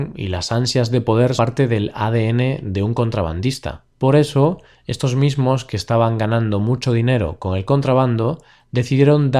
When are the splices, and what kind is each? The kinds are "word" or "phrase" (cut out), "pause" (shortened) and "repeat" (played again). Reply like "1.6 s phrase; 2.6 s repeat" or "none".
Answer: 1.4 s word; 3.9 s pause